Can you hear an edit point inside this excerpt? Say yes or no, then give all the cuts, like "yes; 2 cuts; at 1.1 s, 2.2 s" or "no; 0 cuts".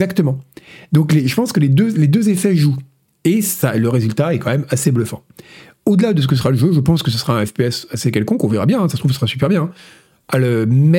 no; 0 cuts